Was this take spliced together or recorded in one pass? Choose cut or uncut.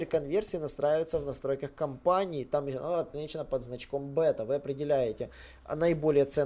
uncut